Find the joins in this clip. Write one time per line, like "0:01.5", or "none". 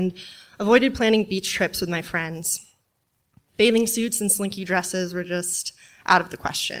none